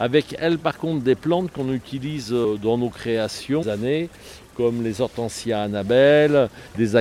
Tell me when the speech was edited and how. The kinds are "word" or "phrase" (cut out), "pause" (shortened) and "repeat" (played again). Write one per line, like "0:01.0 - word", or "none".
0:03.6 - phrase